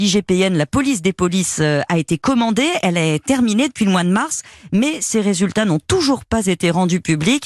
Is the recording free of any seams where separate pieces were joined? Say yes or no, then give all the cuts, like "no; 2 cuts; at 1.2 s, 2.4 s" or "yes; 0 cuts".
yes; 0 cuts